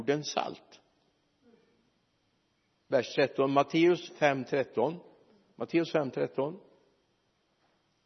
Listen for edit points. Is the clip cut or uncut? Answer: uncut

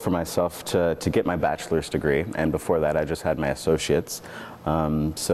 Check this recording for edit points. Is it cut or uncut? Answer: uncut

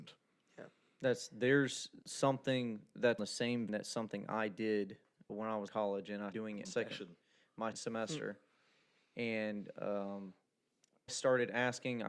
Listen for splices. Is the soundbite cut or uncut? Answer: cut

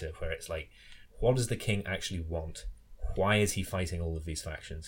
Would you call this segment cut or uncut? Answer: uncut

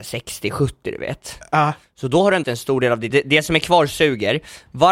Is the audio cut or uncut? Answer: cut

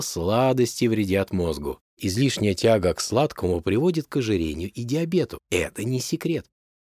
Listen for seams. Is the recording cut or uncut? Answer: cut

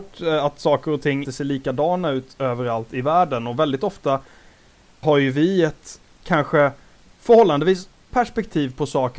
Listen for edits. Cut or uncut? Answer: cut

